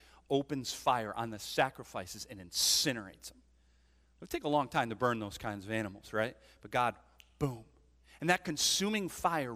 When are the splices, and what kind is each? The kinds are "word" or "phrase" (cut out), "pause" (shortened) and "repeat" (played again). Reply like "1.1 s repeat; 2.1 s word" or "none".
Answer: none